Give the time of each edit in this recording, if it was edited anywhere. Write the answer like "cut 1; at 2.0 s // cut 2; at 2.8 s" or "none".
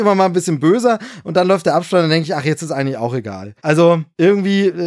cut 1; at 3.6 s